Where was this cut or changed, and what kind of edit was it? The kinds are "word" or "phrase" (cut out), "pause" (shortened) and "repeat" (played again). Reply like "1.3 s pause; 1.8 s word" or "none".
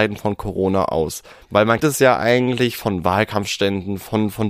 1.8 s word